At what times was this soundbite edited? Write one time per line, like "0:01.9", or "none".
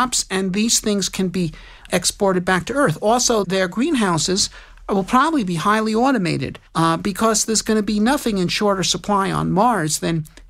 0:01.9
0:03.4
0:06.7